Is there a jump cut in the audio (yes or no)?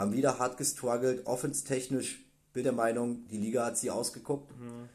yes